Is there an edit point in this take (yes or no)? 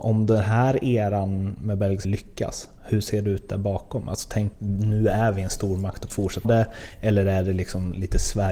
yes